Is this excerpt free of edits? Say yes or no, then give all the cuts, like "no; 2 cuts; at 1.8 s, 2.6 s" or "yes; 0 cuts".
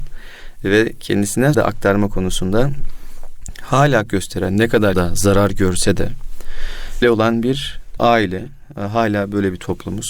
no; 5 cuts; at 1.5 s, 4.1 s, 4.9 s, 7.0 s, 8.0 s